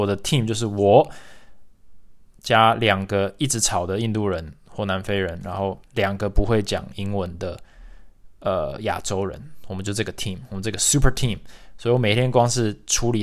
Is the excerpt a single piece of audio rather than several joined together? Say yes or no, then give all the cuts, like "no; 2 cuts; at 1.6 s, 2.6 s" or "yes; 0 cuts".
yes; 0 cuts